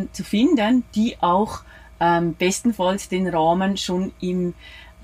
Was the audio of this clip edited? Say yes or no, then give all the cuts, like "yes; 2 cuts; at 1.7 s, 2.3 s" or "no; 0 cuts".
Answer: no; 0 cuts